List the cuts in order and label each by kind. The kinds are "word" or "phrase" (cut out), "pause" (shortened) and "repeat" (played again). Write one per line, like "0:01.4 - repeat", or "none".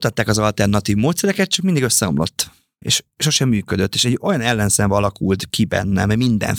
none